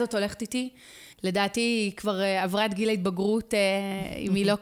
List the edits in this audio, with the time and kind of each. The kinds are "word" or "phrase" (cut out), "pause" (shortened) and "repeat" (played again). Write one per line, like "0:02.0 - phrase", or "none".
0:01.1 - pause